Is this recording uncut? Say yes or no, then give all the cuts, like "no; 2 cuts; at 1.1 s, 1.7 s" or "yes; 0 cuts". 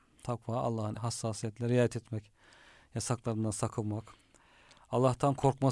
no; 1 cut; at 0.9 s